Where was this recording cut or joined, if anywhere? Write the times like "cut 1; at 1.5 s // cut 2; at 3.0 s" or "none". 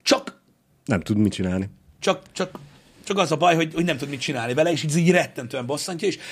none